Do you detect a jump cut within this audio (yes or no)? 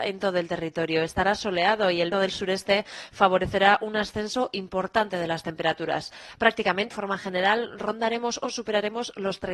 yes